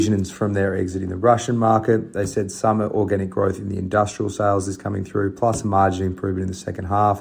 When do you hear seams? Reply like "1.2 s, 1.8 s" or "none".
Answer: none